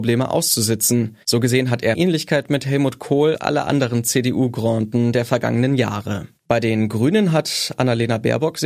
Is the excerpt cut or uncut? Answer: cut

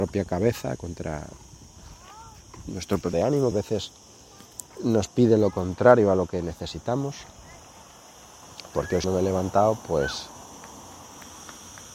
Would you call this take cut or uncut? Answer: cut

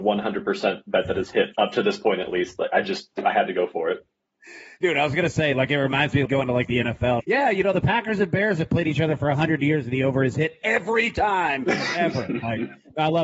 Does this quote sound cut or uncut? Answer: cut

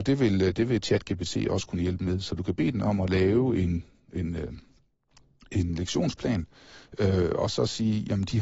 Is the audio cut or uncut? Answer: uncut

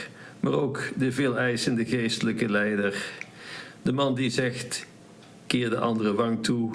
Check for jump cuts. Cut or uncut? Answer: uncut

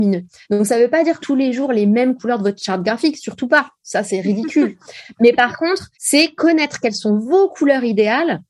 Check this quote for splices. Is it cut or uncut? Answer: cut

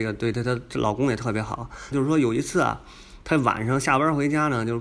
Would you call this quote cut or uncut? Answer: cut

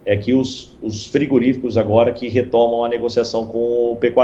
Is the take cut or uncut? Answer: uncut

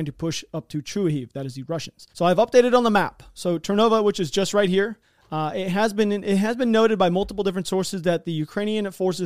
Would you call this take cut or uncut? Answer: cut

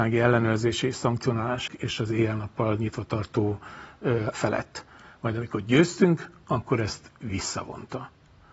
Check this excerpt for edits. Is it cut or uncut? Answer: cut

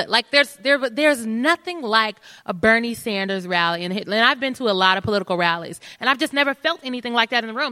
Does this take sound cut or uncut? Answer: uncut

